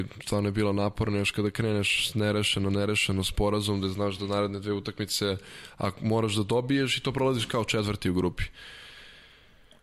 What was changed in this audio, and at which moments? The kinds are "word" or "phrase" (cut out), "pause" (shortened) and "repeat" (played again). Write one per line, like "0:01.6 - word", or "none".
none